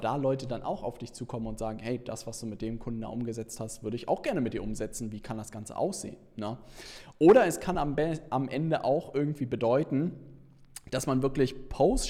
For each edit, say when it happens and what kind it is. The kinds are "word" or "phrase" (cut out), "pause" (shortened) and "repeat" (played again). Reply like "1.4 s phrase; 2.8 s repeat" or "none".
none